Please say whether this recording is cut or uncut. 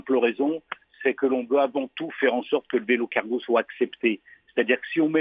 uncut